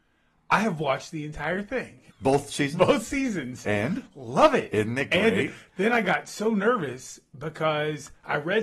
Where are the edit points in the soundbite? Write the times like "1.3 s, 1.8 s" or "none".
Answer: 2.1 s